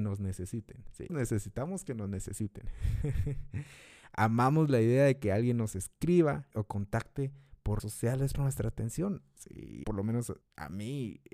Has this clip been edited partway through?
yes; 6 cuts; at 1.1 s, 6.5 s, 7.8 s, 8.3 s, 9.8 s, 10.4 s

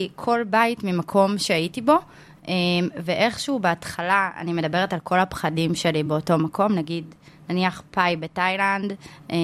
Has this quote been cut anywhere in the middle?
no; 0 cuts

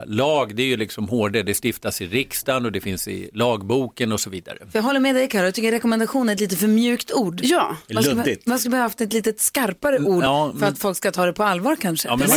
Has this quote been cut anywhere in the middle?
no; 0 cuts

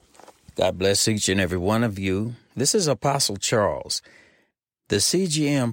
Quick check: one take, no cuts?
yes; 0 cuts

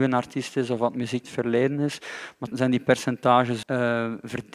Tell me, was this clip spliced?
yes; 3 cuts; at 1.2 s, 2.5 s, 3.6 s

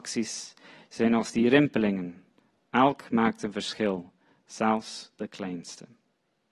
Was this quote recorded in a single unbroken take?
yes; 0 cuts

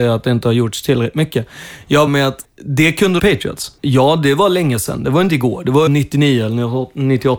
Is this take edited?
yes; 5 cuts; at 2.1 s, 2.4 s, 3.2 s, 3.8 s, 5.9 s

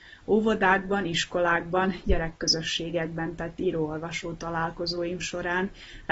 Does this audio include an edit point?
no; 0 cuts

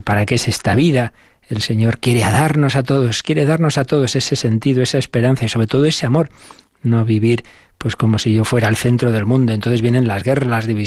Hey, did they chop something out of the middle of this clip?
no; 0 cuts

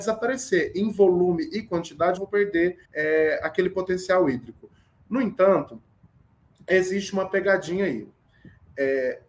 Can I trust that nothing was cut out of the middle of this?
no; 2 cuts; at 2.2 s, 2.8 s

